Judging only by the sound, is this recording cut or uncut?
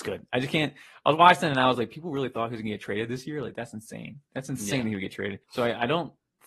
cut